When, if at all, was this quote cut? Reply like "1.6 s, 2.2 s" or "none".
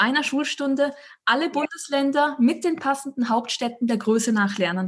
none